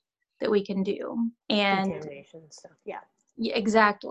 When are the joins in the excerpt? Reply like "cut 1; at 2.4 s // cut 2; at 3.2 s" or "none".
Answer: cut 1; at 1.4 s